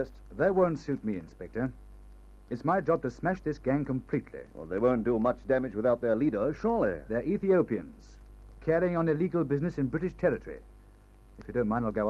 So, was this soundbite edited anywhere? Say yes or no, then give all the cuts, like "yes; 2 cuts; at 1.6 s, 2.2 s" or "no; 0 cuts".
no; 0 cuts